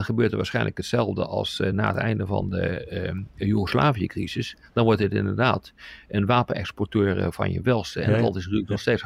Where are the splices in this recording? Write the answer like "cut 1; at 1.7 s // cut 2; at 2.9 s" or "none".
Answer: none